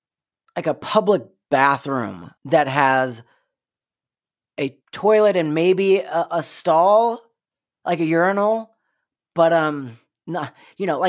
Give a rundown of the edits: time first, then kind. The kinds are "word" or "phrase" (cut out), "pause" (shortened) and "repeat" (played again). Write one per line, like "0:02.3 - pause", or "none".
0:02.4 - pause
0:04.8 - pause